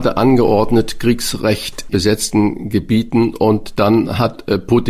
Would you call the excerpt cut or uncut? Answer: cut